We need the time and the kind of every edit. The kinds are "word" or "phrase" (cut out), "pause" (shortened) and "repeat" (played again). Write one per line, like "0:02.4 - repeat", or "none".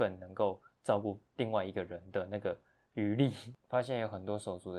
0:01.3 - pause
0:03.6 - pause